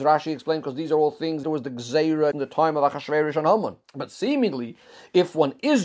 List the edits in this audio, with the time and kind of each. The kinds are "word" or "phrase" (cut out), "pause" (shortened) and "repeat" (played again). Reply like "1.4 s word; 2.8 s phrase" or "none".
1.4 s word; 2.3 s word; 3.8 s pause